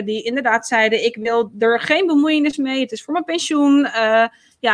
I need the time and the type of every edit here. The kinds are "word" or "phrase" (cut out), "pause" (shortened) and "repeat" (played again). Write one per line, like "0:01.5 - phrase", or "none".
none